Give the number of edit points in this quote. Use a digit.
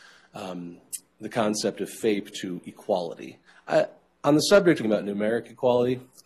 2